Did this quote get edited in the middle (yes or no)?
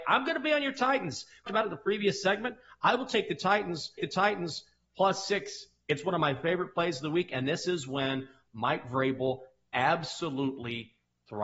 yes